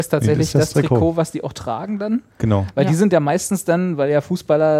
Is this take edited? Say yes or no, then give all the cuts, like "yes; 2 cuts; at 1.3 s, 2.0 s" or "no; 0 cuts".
yes; 1 cut; at 2.3 s